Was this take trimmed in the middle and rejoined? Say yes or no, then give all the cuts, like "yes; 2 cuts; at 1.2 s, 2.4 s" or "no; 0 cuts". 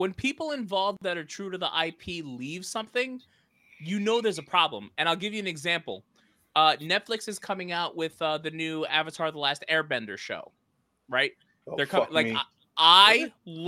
no; 0 cuts